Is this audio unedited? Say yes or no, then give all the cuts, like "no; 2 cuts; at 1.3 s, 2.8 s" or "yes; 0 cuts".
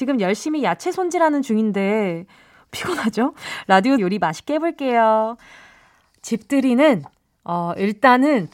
no; 2 cuts; at 2.7 s, 4.0 s